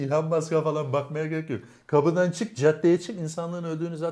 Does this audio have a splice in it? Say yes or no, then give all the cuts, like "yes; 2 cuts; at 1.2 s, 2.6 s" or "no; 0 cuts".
no; 0 cuts